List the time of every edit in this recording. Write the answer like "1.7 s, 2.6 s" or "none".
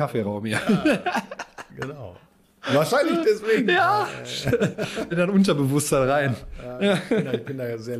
2.3 s, 5.1 s, 7.1 s